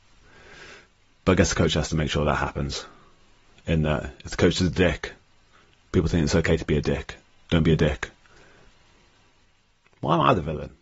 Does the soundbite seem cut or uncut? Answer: uncut